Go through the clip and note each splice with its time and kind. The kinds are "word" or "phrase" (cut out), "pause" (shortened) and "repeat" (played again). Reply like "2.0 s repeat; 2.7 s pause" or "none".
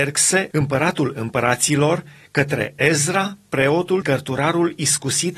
4.0 s word